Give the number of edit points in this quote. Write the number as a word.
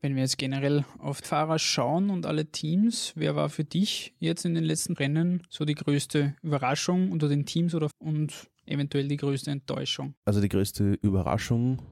four